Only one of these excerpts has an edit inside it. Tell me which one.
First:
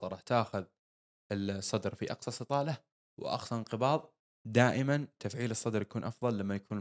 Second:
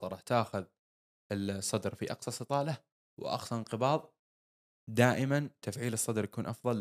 first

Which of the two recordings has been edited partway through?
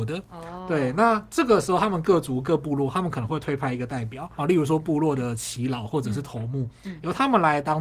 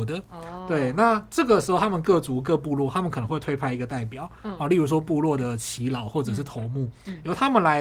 first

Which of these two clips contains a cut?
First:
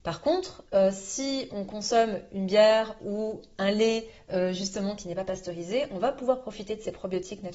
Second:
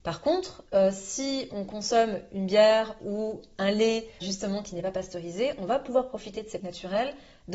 second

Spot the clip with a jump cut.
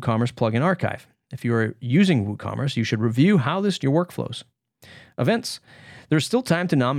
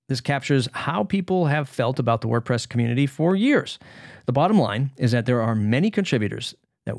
first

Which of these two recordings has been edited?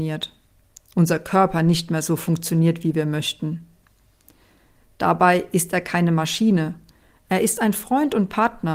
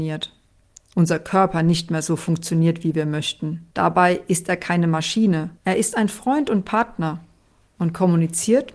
second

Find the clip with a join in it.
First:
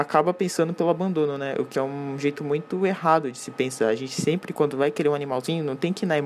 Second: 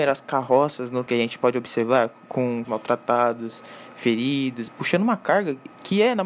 second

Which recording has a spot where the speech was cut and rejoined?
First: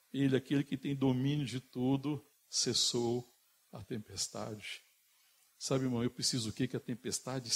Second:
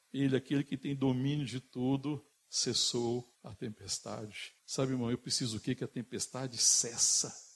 second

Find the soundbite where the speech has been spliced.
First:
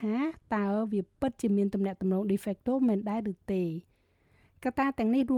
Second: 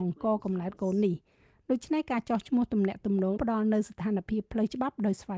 second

